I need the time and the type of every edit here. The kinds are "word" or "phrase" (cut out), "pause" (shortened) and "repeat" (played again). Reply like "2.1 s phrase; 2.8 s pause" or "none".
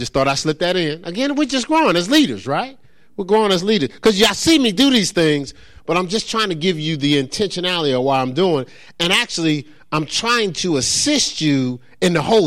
none